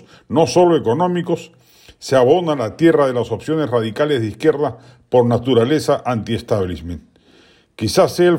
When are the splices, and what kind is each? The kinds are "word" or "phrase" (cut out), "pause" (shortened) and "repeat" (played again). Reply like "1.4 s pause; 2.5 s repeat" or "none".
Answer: none

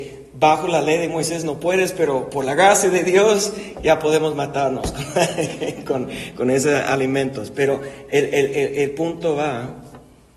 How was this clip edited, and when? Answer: none

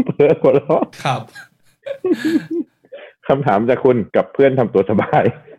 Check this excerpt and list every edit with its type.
0.9 s pause; 4.1 s pause

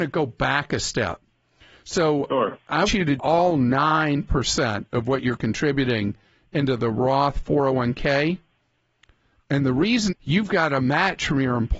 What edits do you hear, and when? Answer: 2.9 s word; 3.2 s word; 10.1 s word

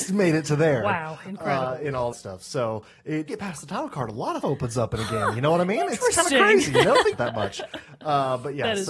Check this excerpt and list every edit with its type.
2.1 s word; 3.3 s phrase; 4.4 s word; 7.1 s word

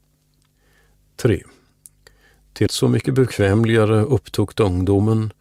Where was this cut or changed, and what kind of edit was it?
2.7 s word

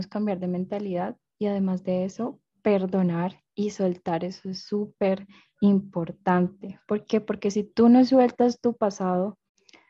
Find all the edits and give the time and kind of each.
none

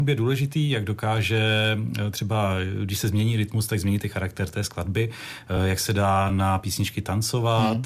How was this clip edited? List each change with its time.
none

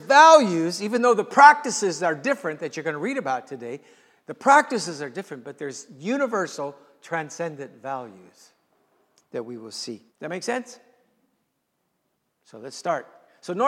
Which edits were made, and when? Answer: 10.1 s pause

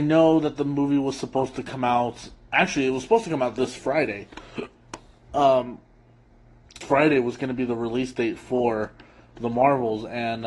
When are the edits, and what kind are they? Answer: 6.8 s word

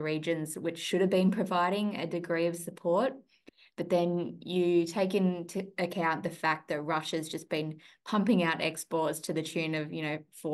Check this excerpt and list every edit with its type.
none

